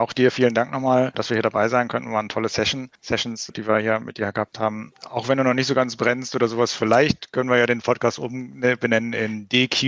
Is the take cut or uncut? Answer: uncut